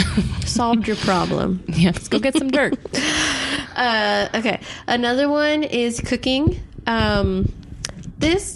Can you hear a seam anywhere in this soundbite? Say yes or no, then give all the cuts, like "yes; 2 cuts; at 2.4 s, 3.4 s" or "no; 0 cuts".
no; 0 cuts